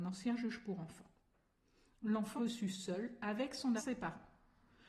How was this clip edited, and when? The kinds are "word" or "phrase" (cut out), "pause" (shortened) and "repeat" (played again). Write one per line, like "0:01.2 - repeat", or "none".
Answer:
0:02.4 - word
0:03.8 - phrase